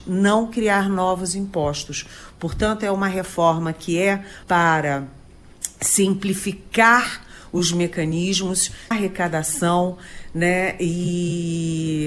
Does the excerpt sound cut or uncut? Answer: cut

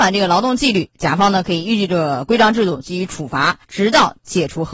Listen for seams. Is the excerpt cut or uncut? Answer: cut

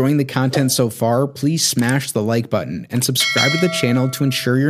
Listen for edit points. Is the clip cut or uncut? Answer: uncut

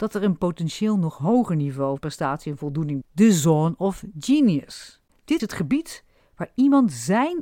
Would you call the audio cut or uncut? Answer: cut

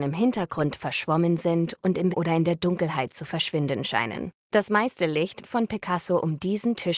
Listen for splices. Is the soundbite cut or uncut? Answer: cut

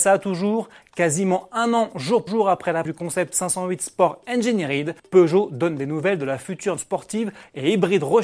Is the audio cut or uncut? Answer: cut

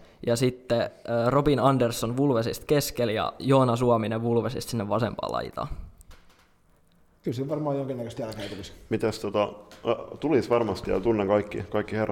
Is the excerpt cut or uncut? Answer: uncut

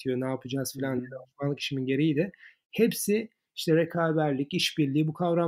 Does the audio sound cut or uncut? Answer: uncut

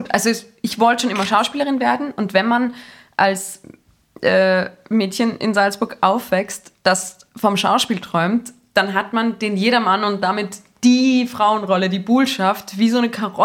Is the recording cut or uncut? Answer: uncut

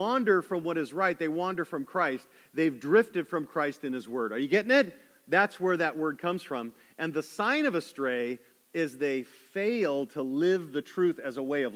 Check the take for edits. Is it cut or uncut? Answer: uncut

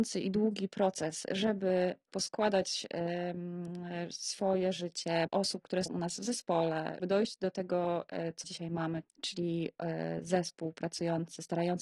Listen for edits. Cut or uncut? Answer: cut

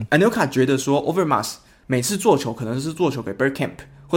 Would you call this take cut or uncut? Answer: uncut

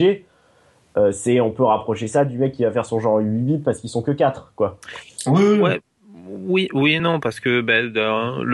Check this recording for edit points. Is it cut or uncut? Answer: uncut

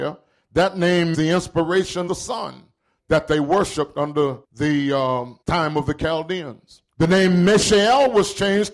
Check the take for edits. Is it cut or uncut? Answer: cut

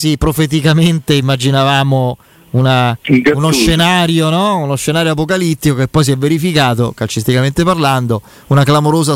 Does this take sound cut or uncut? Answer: uncut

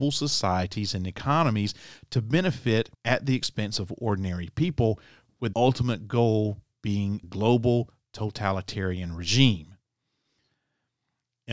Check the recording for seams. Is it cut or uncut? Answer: cut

